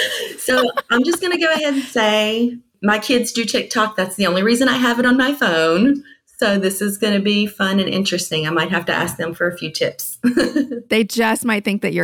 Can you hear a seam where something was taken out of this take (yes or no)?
no